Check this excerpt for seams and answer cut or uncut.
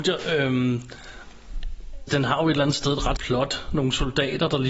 cut